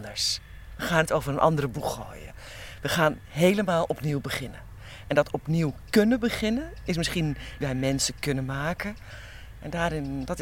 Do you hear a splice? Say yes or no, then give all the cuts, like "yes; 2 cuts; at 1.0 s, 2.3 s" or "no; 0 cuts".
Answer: yes; 1 cut; at 7.6 s